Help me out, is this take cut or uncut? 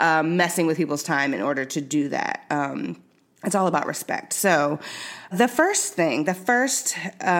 cut